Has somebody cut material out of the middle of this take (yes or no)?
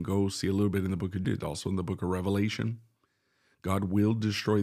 yes